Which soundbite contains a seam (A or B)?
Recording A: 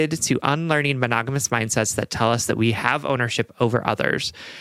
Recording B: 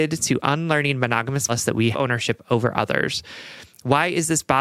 B